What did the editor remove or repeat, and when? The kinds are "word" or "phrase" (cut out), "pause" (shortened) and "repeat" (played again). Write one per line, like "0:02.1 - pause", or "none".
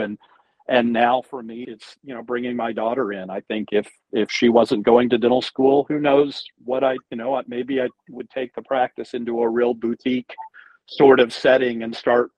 0:01.6 - word

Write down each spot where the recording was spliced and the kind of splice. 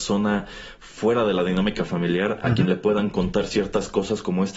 none

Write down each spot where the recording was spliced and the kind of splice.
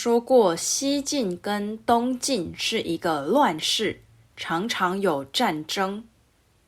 none

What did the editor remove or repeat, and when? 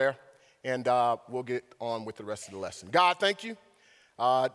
none

